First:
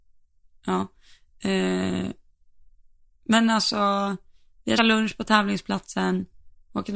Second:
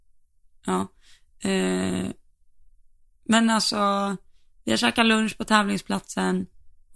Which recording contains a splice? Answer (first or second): first